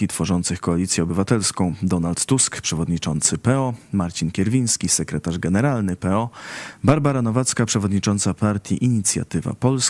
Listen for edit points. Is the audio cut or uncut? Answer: uncut